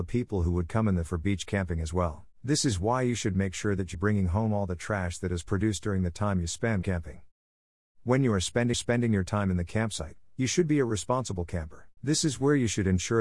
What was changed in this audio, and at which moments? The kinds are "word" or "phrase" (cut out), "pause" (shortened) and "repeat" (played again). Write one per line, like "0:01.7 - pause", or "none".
0:01.1 - word
0:02.3 - pause
0:03.9 - word
0:06.8 - phrase
0:08.7 - repeat
0:12.0 - pause

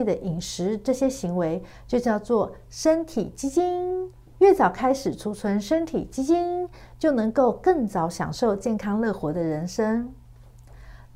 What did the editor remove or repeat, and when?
0:04.3 - pause

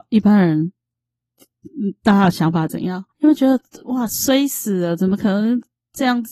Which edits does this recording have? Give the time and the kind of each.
0:03.1 - pause

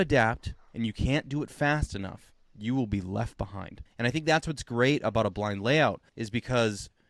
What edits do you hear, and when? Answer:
0:03.9 - pause
0:06.1 - pause

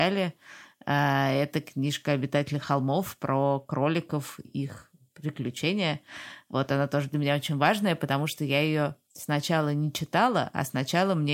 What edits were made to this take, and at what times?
0:04.4 - word

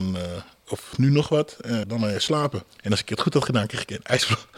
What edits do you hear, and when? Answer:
0:01.8 - word
0:02.7 - pause

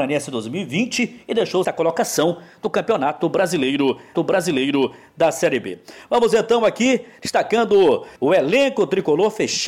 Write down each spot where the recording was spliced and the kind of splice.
0:01.6 - phrase
0:04.1 - repeat
0:08.2 - pause

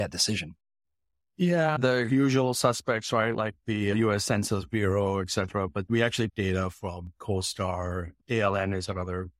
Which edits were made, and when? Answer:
0:01.8 - word
0:05.9 - word
0:06.3 - phrase

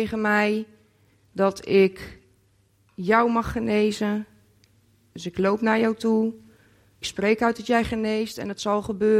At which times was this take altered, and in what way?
0:07.0 - word

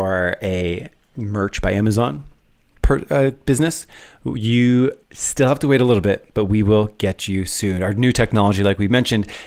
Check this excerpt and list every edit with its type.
0:05.0 - pause

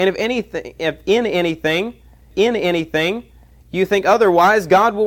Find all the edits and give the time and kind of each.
0:02.3 - repeat

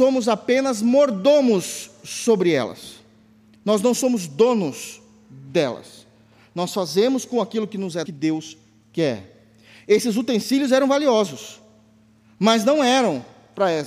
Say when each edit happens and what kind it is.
0:08.1 - phrase

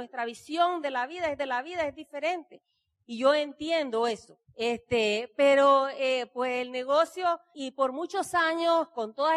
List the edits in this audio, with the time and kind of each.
0:01.4 - repeat
0:04.4 - pause
0:07.5 - word

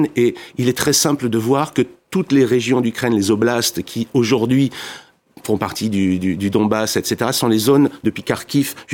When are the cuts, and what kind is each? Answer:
none

